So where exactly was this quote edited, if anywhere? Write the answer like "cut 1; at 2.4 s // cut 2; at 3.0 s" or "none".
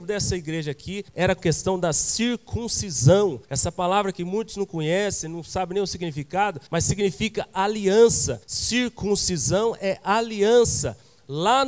cut 1; at 1.1 s // cut 2; at 1.4 s // cut 3; at 3.4 s // cut 4; at 6.7 s // cut 5; at 8.4 s

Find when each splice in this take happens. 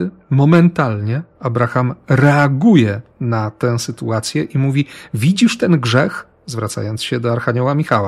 none

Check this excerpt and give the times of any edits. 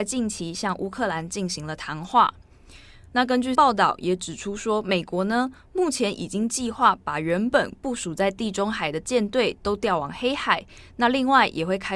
cut 1; at 3.5 s

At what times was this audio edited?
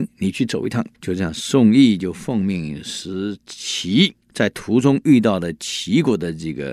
cut 1; at 0.9 s // cut 2; at 4.2 s

